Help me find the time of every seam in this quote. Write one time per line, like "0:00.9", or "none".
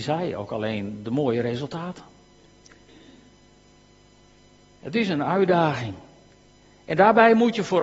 none